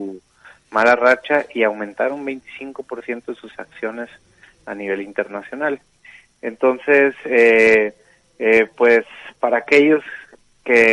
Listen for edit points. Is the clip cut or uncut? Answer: uncut